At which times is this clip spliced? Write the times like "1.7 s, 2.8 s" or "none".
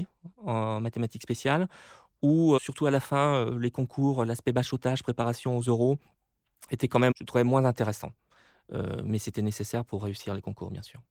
2.6 s, 7.1 s

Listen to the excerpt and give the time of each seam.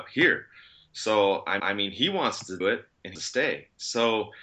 1.6 s, 2.6 s, 3.2 s

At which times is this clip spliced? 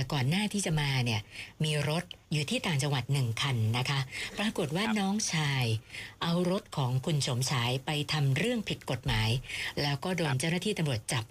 2.2 s

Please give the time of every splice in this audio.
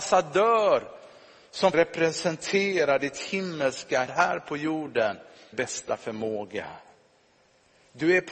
1.7 s, 4.1 s, 5.5 s

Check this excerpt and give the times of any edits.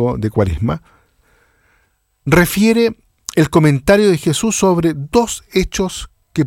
none

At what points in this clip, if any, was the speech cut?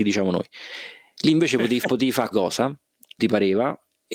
1.8 s, 2.3 s, 3.2 s

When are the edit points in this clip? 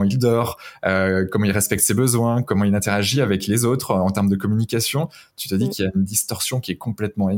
none

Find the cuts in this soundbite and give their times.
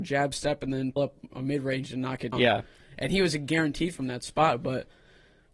1.0 s, 2.3 s

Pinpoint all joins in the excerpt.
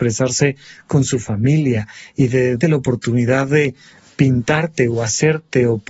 2.6 s

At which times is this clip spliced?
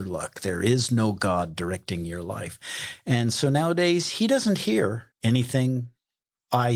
5.1 s

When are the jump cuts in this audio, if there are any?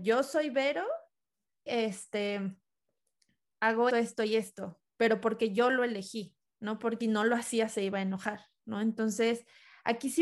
1.7 s, 3.9 s, 4.9 s, 7.0 s

